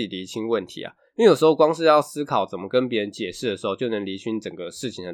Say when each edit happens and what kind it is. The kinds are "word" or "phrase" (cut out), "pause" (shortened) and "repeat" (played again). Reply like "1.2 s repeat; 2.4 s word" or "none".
none

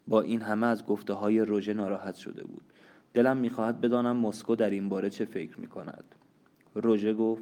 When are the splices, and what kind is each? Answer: none

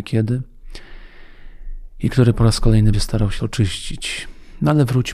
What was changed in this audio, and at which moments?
2.9 s word; 3.4 s word

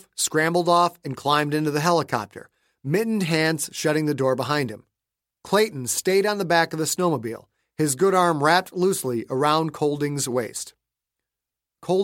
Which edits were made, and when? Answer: none

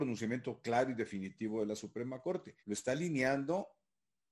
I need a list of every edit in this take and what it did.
2.6 s pause

